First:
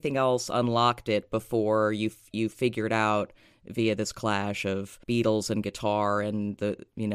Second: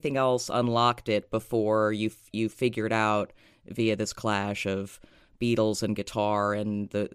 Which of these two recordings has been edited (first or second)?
first